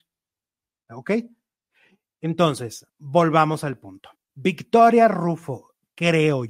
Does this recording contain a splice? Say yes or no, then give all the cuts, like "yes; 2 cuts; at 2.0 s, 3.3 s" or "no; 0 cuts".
yes; 2 cuts; at 2.9 s, 4.1 s